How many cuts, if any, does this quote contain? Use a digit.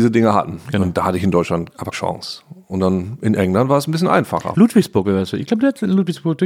1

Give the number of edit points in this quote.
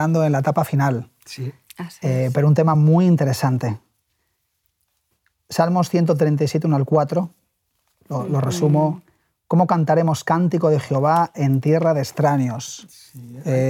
0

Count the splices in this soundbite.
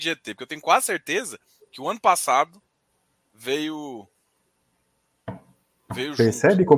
0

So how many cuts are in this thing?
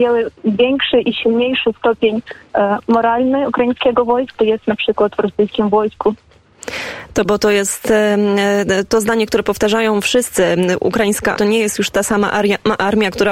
3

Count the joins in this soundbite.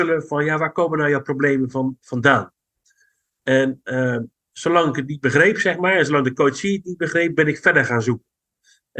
0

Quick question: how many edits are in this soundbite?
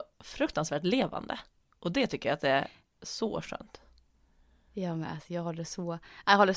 0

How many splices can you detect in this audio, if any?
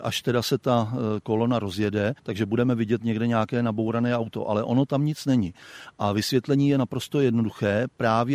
1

